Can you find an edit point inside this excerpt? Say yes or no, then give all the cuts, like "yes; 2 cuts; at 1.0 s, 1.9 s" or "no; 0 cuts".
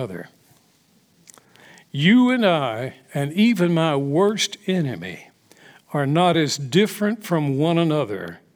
no; 0 cuts